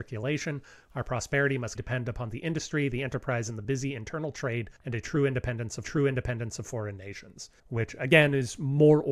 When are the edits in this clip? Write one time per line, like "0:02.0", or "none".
0:01.8
0:04.8
0:05.8
0:07.6